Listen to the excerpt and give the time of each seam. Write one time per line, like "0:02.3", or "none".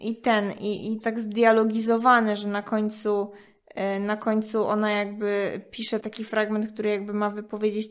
0:01.0
0:06.0